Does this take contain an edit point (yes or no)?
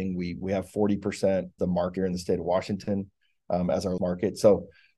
yes